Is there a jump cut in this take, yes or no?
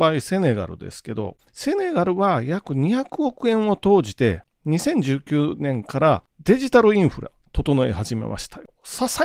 no